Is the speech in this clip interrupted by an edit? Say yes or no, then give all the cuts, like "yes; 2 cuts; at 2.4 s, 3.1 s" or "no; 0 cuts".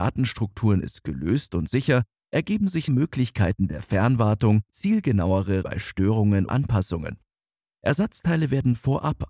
yes; 4 cuts; at 2.9 s, 4.7 s, 5.6 s, 6.5 s